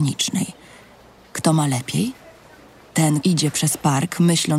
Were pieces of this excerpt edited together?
yes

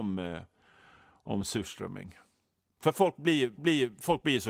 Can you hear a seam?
yes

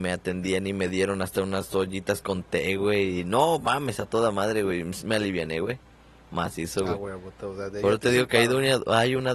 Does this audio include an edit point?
no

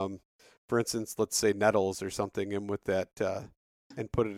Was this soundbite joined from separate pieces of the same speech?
no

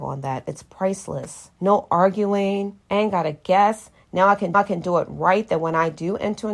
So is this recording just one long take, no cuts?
no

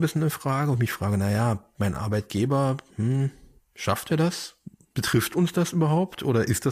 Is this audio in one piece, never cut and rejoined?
yes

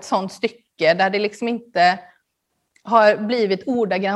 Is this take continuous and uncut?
yes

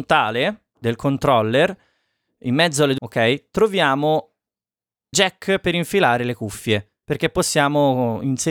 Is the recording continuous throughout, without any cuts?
no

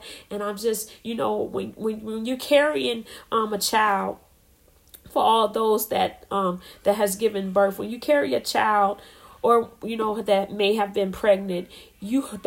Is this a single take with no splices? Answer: yes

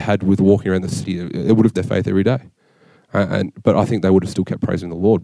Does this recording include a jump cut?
yes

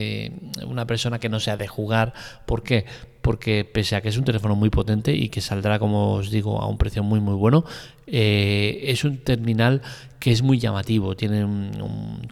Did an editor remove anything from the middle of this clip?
no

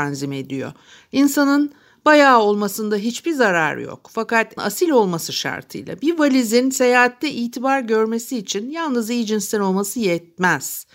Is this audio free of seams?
no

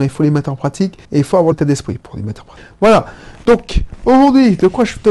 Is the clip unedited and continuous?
no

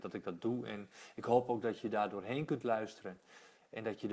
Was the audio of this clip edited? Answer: no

